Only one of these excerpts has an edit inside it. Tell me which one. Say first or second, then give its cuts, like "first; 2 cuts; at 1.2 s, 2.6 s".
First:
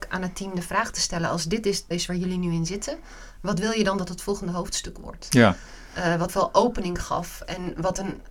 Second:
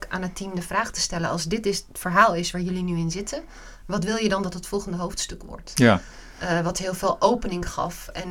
first; 2 cuts; at 1.9 s, 6.3 s